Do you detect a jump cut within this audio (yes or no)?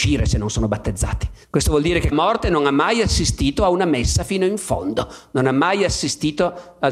yes